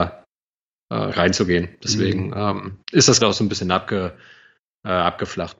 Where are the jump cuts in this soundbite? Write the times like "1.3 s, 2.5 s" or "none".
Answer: 1.1 s, 2.8 s, 3.2 s

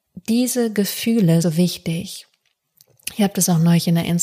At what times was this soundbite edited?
1.4 s

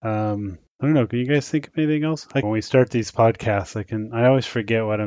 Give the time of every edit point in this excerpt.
2.4 s

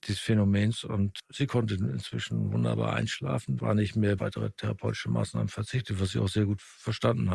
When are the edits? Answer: 3.6 s, 4.2 s

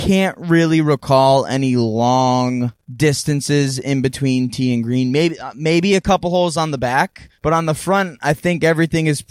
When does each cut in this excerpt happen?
2.8 s, 7.3 s

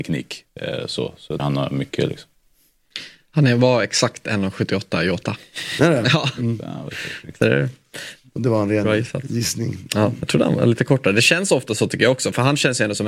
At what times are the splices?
1.4 s

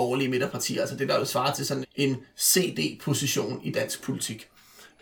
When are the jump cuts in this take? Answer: 1.8 s

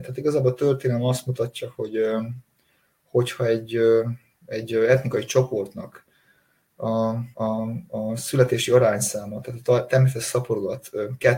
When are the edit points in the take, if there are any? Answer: 7.3 s

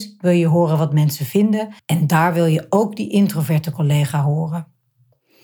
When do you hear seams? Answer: 1.8 s

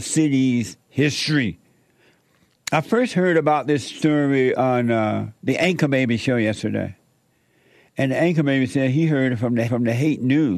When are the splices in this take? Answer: 5.4 s, 9.7 s

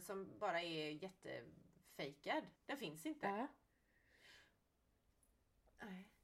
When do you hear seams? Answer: 2.6 s

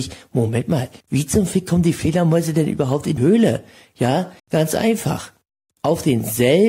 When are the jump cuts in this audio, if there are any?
1.0 s, 3.2 s, 4.4 s

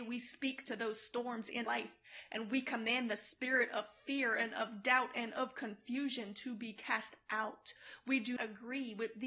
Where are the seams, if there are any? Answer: 1.7 s, 8.4 s

